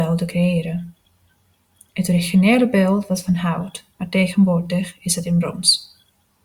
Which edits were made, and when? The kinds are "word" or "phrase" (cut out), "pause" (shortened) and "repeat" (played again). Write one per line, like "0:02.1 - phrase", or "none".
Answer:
none